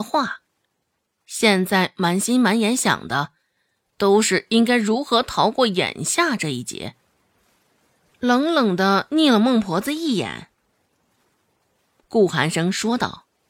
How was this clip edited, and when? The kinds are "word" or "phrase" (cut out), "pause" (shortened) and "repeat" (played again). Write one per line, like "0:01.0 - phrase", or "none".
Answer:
none

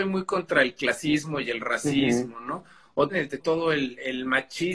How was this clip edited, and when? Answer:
0:03.1 - word
0:03.4 - word

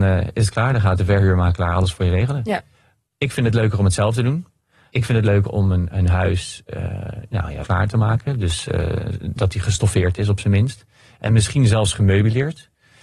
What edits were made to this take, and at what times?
0:07.6 - word

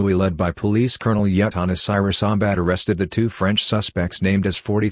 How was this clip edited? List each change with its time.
none

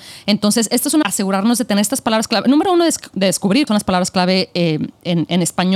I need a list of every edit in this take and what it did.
0:01.0 - phrase
0:03.7 - word

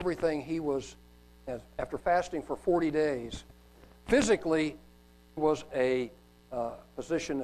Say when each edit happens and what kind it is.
0:01.3 - word
0:02.0 - word
0:05.4 - word
0:05.7 - word

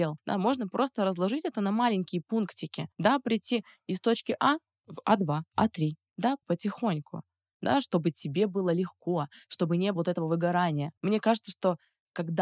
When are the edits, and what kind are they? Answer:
0:05.5 - pause
0:06.4 - word
0:09.9 - word

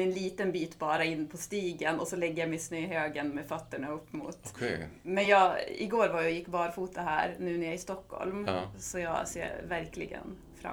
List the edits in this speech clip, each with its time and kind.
none

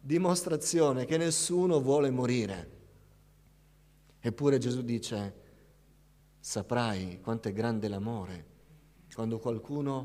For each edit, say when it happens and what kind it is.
none

